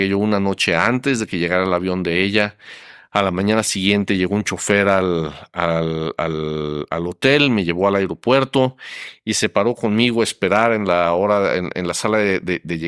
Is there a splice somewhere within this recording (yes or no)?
no